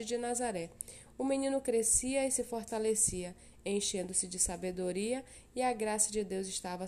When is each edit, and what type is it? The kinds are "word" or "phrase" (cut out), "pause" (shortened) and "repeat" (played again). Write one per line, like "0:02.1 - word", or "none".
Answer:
none